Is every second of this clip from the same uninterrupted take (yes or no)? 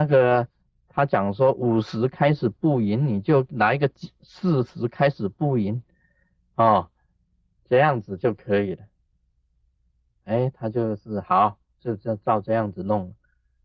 yes